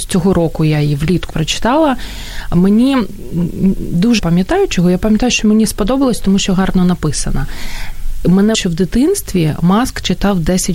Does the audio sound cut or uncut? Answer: cut